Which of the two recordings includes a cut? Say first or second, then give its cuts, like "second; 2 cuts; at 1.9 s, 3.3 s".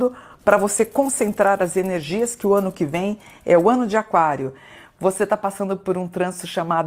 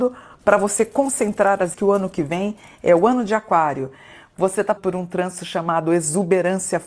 second; 2 cuts; at 1.7 s, 4.8 s